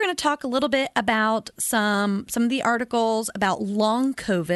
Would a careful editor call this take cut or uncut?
uncut